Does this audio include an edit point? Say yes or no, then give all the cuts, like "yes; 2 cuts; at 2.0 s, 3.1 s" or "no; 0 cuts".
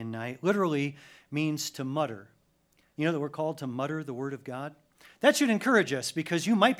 no; 0 cuts